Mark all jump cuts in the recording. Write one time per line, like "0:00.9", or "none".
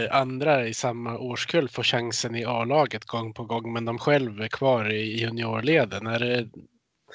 none